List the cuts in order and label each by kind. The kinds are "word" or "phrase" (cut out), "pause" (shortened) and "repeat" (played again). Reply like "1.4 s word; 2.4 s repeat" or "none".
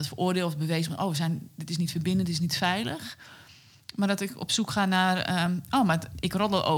none